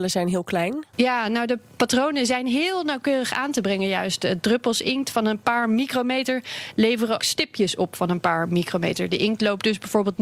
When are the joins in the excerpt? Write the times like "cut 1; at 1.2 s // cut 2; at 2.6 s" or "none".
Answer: cut 1; at 7.2 s